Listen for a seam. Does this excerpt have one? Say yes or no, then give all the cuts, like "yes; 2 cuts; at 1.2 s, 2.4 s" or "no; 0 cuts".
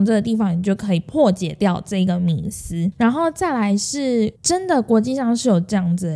yes; 1 cut; at 4.3 s